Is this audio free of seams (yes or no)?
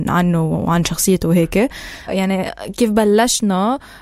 yes